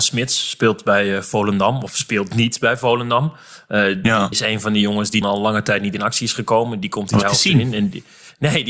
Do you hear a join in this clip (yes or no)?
yes